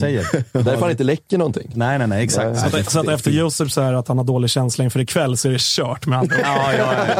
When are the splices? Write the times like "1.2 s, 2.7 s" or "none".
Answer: none

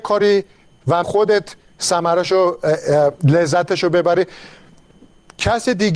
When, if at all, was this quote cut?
1.0 s

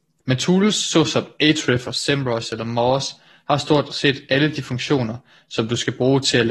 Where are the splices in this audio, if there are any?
none

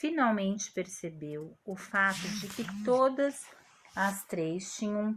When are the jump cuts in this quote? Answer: none

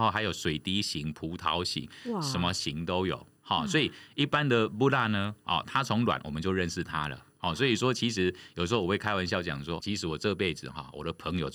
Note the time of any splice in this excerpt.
9.8 s

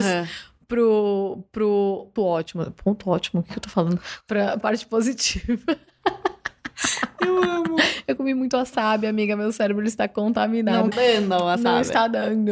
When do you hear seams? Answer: 2.2 s, 4.6 s, 10.9 s

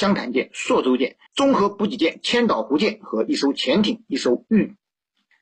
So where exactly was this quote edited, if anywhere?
1.3 s

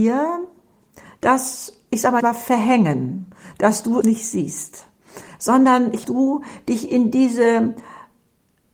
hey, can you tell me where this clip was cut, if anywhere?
2.2 s, 4.0 s, 6.0 s

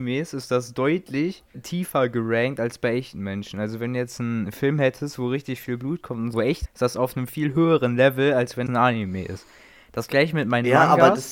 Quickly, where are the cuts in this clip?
1.5 s, 6.3 s, 6.7 s, 8.7 s

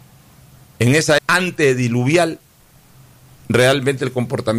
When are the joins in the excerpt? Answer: 1.2 s

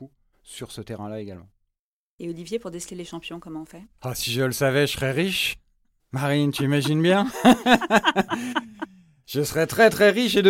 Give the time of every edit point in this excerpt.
3.9 s

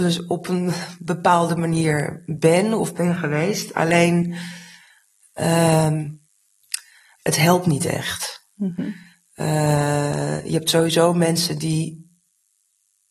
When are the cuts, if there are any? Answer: none

